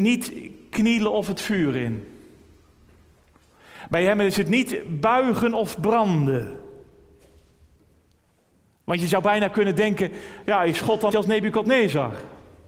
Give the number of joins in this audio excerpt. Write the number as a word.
one